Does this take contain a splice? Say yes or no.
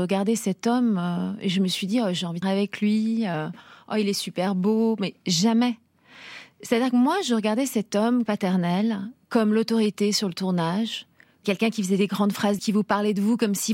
yes